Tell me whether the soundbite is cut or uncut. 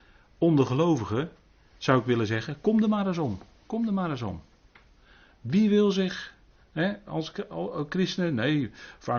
uncut